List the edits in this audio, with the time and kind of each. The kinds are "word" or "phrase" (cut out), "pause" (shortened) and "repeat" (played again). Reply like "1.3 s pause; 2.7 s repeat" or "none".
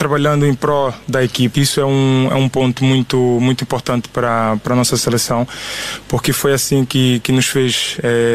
1.5 s phrase